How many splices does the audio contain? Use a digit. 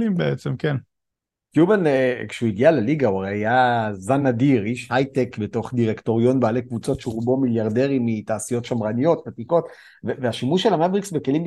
0